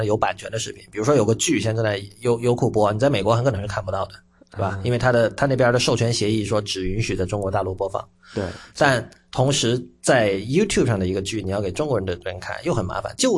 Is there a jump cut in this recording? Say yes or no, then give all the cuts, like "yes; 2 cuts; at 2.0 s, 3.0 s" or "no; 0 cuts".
no; 0 cuts